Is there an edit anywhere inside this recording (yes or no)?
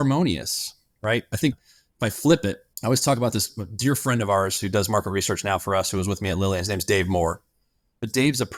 yes